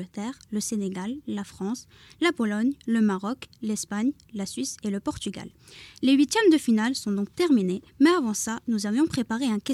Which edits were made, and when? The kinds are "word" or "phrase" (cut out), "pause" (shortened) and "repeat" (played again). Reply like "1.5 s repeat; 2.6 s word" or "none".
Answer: none